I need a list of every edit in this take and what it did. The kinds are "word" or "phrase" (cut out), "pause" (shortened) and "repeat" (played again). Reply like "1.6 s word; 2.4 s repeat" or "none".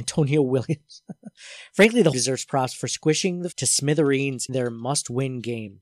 2.1 s phrase; 3.5 s word; 4.5 s word